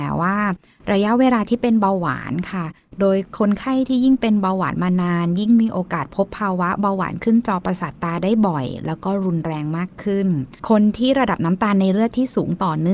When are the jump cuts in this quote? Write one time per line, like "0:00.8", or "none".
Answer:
0:10.6